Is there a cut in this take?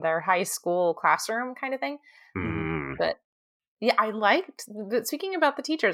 no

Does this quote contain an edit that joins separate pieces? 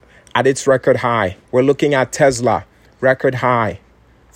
yes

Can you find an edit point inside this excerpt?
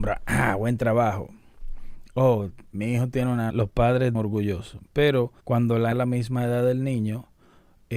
yes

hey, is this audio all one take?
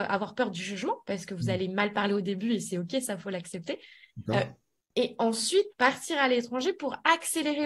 yes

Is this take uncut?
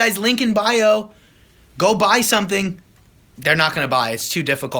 yes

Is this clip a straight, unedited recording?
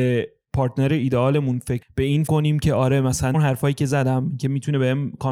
no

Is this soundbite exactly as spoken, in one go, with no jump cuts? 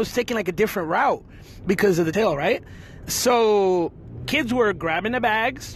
no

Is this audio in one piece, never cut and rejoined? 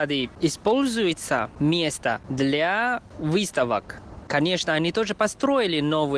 no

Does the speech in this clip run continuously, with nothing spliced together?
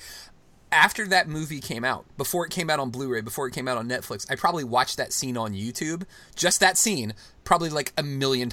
no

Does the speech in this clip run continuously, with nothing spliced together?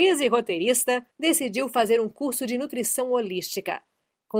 no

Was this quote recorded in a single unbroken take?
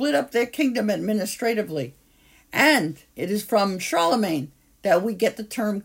no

